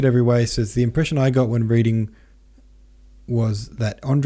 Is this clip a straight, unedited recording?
yes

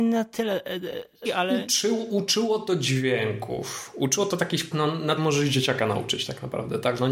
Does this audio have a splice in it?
yes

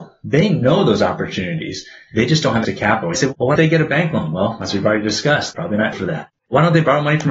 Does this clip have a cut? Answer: yes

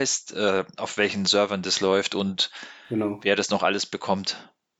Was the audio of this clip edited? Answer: no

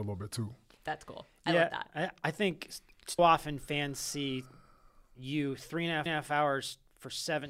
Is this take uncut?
no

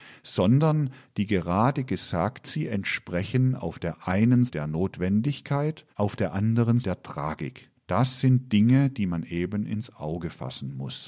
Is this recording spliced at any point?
yes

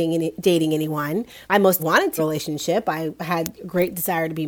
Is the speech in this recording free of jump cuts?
no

